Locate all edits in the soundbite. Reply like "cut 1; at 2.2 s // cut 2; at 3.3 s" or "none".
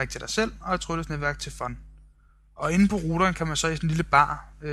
none